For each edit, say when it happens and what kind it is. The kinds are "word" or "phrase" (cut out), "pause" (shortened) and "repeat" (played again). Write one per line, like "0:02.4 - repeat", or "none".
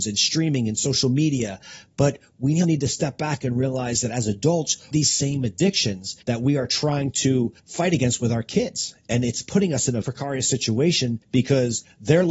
0:02.6 - word
0:04.9 - phrase
0:06.2 - pause
0:07.6 - pause
0:10.0 - word
0:11.2 - pause